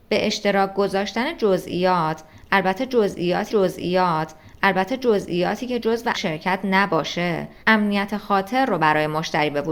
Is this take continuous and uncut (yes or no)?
no